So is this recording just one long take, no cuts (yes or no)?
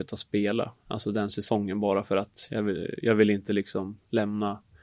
yes